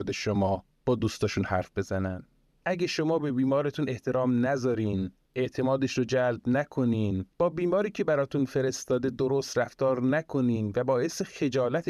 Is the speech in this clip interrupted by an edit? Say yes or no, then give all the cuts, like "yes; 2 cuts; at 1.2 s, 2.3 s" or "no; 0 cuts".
yes; 1 cut; at 7.3 s